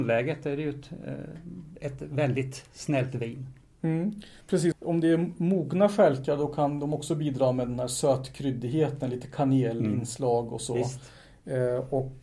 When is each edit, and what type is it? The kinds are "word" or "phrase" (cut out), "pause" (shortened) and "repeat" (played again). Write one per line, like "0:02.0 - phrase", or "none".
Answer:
0:04.7 - phrase